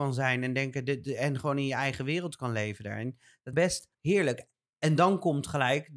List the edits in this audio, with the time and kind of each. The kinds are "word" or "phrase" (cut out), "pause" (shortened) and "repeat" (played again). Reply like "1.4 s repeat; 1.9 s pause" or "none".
3.5 s phrase; 3.9 s pause